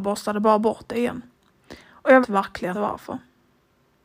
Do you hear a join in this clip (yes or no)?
yes